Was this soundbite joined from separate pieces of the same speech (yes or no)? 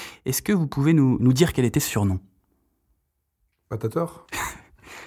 no